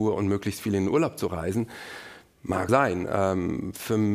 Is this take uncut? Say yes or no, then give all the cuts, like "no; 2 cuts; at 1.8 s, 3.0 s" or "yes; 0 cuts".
no; 1 cut; at 2.7 s